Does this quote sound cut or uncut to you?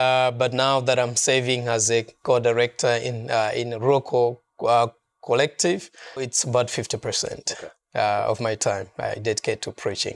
cut